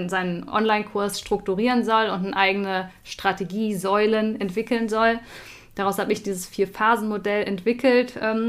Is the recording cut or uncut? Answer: uncut